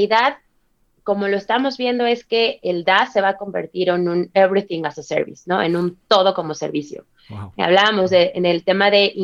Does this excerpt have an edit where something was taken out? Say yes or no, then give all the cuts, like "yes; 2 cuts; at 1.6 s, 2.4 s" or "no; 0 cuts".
no; 0 cuts